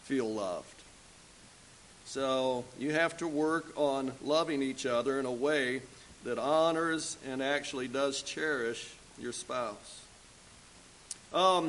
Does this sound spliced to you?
no; 0 cuts

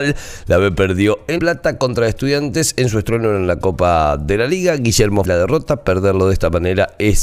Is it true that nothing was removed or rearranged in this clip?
no; 2 cuts; at 1.4 s, 5.2 s

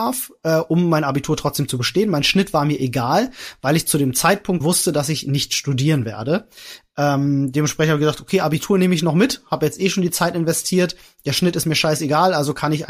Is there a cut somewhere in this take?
yes; 1 cut; at 4.6 s

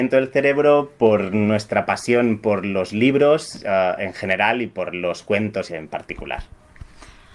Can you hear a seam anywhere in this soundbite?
yes; 1 cut; at 5.7 s

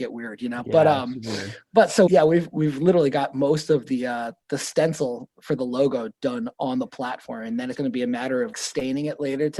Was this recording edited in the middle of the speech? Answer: yes; 3 cuts; at 2.1 s, 7.7 s, 8.5 s

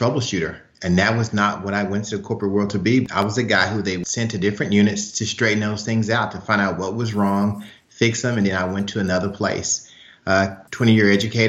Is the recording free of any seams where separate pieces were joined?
yes; 0 cuts

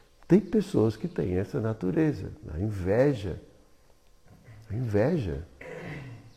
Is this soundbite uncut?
yes; 0 cuts

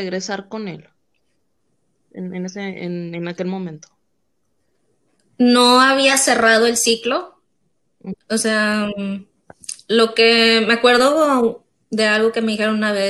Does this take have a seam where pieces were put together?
no; 0 cuts

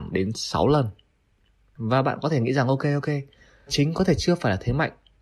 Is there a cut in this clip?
yes; 1 cut; at 3.7 s

